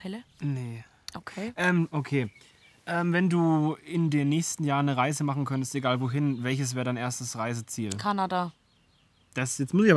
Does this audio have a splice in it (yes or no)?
no